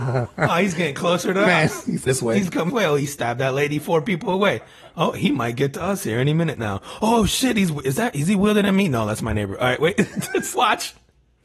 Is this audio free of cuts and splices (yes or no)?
no